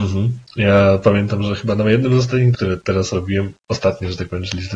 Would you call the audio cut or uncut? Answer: cut